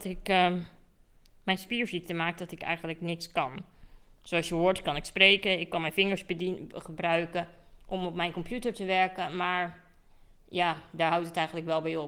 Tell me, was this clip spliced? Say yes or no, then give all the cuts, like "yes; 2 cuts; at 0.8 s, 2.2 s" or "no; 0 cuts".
no; 0 cuts